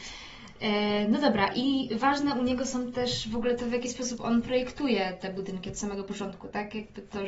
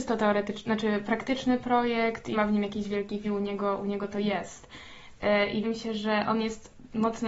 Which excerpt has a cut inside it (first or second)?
second